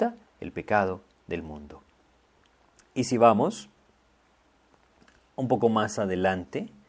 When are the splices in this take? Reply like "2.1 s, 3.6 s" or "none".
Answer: none